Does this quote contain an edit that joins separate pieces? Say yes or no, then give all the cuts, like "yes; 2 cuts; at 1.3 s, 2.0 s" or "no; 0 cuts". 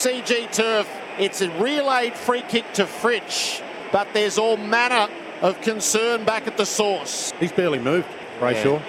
no; 0 cuts